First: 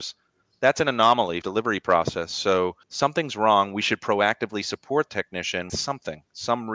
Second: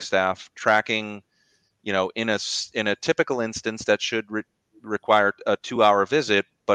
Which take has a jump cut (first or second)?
first